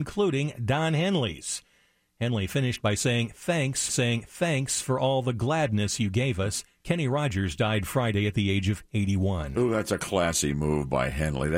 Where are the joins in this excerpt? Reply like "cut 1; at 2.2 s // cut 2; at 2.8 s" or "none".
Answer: cut 1; at 3.9 s

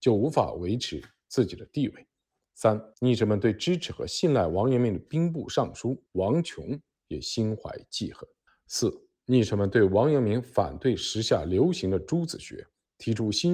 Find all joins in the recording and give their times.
cut 1; at 2.9 s // cut 2; at 6.1 s // cut 3; at 8.5 s

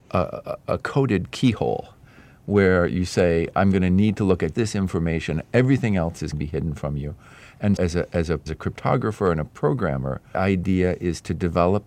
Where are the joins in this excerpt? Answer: cut 1; at 4.5 s // cut 2; at 6.3 s // cut 3; at 7.8 s // cut 4; at 8.5 s // cut 5; at 10.3 s

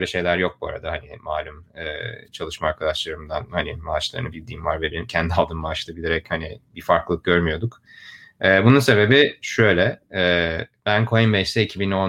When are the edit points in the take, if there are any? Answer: none

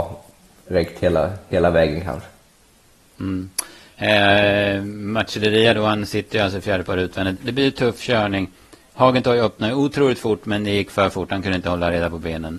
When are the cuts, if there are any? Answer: cut 1; at 7.4 s

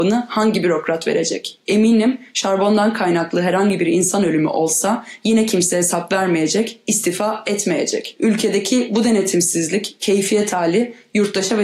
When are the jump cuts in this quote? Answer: none

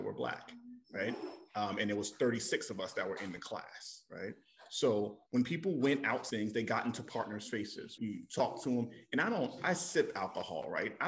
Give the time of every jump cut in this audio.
cut 1; at 5.3 s // cut 2; at 6.3 s // cut 3; at 8.0 s // cut 4; at 9.6 s

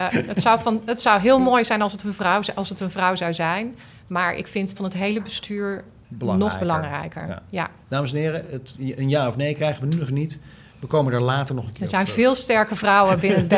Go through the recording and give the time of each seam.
cut 1; at 4.8 s // cut 2; at 10.1 s

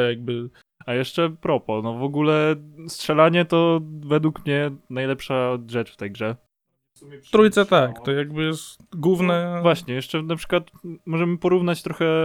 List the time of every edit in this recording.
none

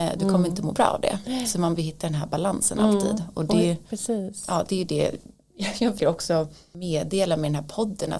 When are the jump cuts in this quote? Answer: cut 1; at 1.8 s // cut 2; at 6.0 s

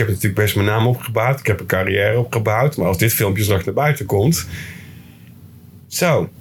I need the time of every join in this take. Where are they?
none

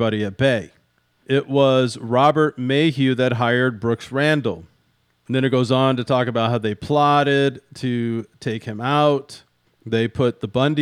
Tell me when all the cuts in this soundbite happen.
none

